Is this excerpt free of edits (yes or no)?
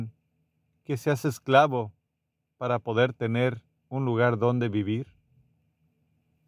yes